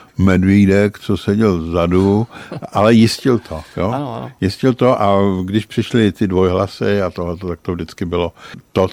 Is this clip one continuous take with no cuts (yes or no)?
yes